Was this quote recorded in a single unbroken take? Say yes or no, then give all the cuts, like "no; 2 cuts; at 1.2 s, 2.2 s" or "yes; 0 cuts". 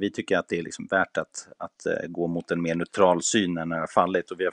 yes; 0 cuts